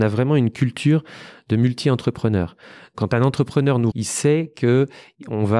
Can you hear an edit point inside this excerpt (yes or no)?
yes